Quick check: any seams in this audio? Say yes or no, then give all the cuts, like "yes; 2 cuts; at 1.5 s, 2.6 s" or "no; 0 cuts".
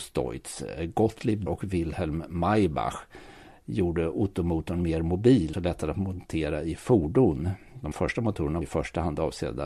yes; 4 cuts; at 1.5 s, 5.5 s, 7.9 s, 8.6 s